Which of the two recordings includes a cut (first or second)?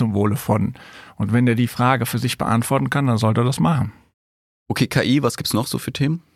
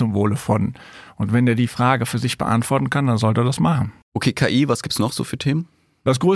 second